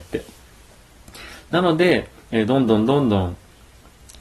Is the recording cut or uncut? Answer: cut